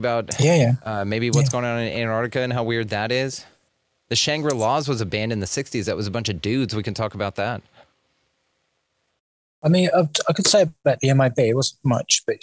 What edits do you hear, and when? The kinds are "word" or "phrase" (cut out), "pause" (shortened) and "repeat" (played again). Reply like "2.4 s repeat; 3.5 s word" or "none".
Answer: none